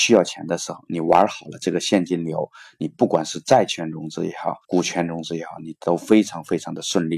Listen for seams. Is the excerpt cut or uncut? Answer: cut